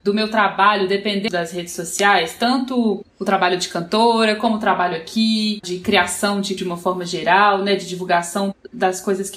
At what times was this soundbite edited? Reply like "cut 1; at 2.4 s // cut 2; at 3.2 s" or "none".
cut 1; at 1.3 s // cut 2; at 3.1 s // cut 3; at 5.6 s // cut 4; at 6.6 s

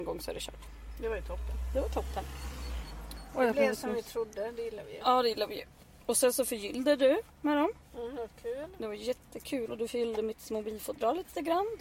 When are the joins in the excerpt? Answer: none

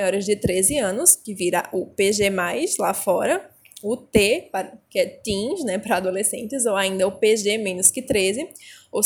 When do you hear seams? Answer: none

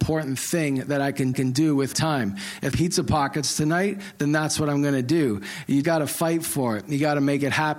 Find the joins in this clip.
cut 1; at 1.3 s // cut 2; at 1.9 s // cut 3; at 2.7 s // cut 4; at 5.8 s

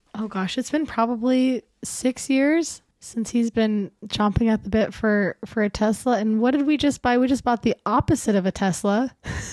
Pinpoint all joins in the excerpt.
cut 1; at 4.0 s

